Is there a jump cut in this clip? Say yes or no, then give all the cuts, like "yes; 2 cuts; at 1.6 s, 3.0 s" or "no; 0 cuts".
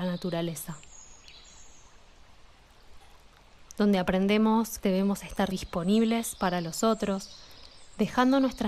yes; 2 cuts; at 4.8 s, 5.5 s